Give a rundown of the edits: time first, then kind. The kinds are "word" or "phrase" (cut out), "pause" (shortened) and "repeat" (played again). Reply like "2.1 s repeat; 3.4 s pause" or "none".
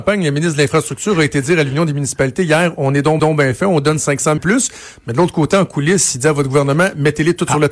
3.2 s repeat; 4.4 s word